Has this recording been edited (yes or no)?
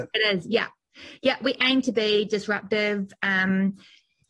no